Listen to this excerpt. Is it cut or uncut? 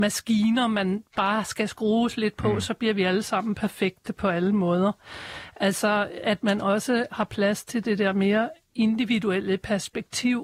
uncut